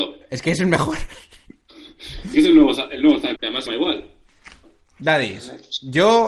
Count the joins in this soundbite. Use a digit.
3